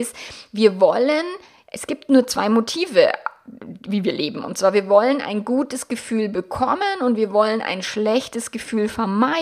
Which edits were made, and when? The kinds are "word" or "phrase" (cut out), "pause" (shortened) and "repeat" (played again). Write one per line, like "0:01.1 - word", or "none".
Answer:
none

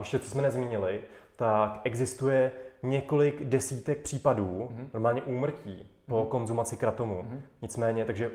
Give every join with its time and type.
none

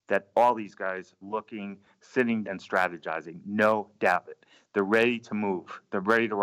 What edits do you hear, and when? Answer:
0:01.2 - word
0:02.4 - word
0:04.3 - word

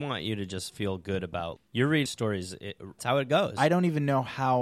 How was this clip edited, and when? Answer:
0:01.6 - word
0:02.1 - word
0:03.0 - phrase

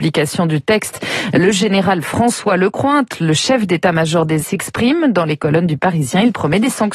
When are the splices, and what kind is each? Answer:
0:04.4 - word

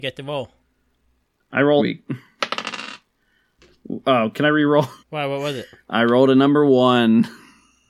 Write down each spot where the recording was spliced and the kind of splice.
0:01.8 - word
0:05.0 - pause

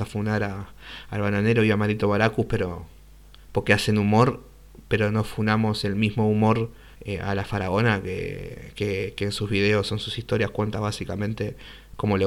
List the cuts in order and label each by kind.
0:03.4 - pause
0:06.9 - pause

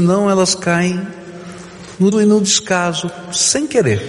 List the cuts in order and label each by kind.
0:02.1 - word

